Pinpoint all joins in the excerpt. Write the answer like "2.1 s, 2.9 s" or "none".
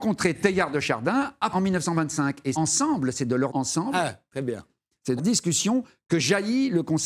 1.5 s, 2.5 s, 3.5 s, 5.2 s